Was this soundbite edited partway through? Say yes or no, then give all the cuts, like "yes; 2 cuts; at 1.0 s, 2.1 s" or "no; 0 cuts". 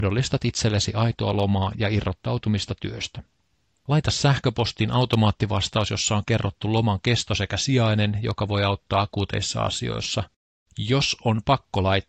no; 0 cuts